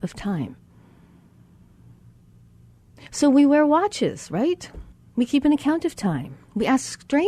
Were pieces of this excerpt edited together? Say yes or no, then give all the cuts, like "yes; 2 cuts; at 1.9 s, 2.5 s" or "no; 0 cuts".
yes; 1 cut; at 4.9 s